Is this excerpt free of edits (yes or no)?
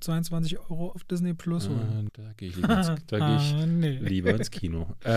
no